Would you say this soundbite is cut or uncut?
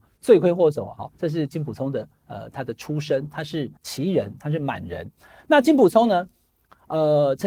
cut